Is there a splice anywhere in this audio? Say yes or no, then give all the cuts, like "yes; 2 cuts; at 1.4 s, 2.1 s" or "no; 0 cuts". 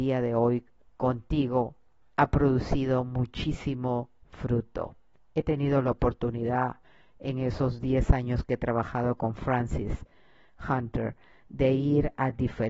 no; 0 cuts